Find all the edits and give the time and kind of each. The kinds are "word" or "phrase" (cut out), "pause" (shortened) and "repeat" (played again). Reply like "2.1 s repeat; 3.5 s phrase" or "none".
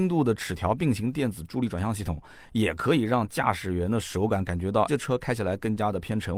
4.9 s word

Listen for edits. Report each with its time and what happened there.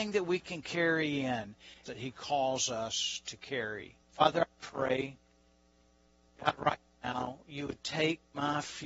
1.9 s phrase; 4.0 s pause; 6.4 s word

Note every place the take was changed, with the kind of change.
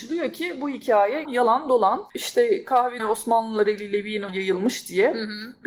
1.2 s word; 2.1 s pause; 3.0 s word; 4.3 s word

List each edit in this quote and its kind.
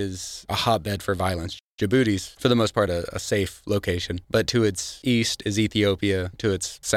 none

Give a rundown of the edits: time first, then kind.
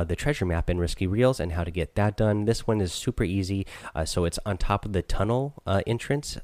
none

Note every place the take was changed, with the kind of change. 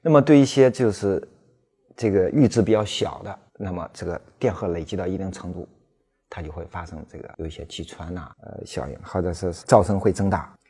3.5 s pause

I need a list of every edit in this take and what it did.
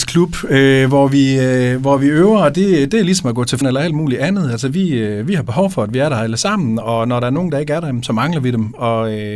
3.6 s phrase

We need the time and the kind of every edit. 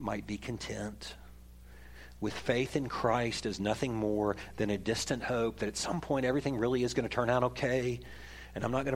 none

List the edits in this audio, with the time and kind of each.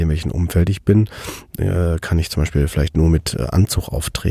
none

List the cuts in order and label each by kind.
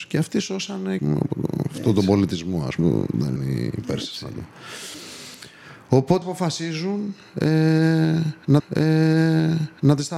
1.0 s phrase; 2.8 s word; 3.4 s word; 6.2 s word; 8.6 s repeat

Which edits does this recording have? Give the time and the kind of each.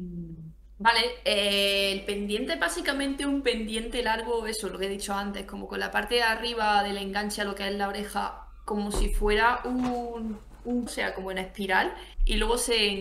10.9 s word

